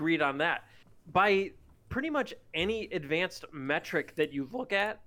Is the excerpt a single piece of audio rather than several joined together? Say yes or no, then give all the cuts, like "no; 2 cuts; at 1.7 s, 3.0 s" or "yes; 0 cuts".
yes; 0 cuts